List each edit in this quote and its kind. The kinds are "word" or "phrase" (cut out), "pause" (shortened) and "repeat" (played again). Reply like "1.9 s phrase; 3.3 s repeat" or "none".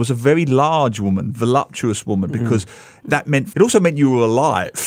3.5 s word